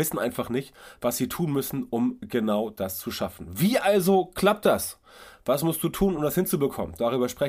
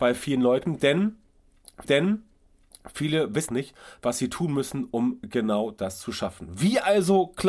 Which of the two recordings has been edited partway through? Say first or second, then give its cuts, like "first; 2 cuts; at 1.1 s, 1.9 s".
second; 2 cuts; at 1.8 s, 3.5 s